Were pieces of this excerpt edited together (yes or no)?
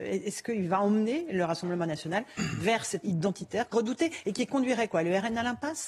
yes